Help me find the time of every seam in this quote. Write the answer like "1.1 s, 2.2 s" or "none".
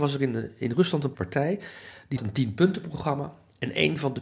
1.1 s, 2.2 s